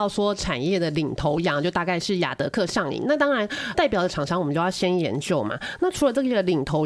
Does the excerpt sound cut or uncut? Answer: cut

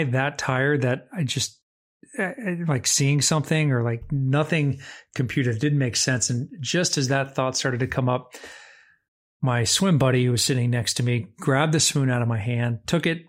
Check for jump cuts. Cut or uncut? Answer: uncut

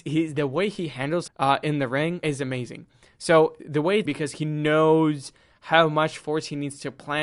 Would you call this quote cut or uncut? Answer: cut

